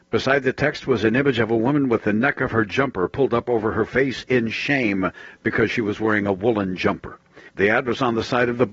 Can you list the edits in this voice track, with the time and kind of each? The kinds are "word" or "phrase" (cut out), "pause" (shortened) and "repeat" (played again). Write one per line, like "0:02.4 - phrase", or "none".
0:07.5 - pause